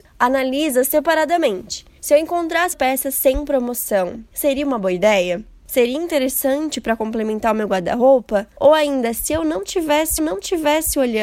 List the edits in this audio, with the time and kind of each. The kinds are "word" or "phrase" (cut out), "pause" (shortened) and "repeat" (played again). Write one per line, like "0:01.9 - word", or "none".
0:02.7 - word
0:10.2 - repeat